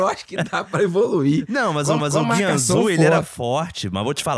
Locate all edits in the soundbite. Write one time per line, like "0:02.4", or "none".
0:02.0